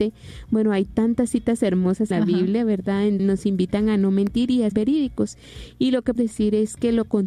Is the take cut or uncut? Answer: cut